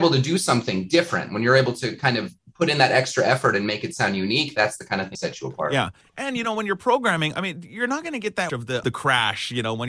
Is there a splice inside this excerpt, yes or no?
yes